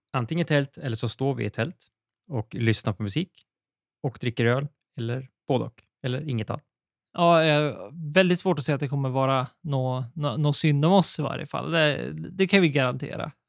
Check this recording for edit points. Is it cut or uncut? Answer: uncut